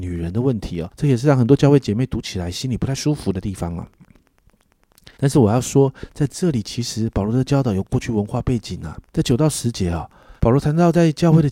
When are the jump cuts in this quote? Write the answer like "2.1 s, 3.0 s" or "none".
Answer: 0.9 s, 5.1 s, 9.1 s, 10.4 s